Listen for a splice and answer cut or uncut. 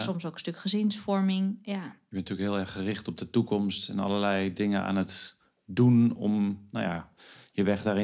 uncut